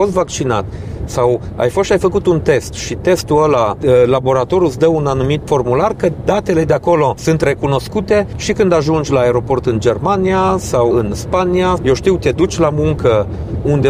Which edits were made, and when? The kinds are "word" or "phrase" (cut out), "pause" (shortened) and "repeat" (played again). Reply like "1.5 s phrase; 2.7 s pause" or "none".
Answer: 2.7 s word; 5.4 s word; 10.9 s word; 11.8 s word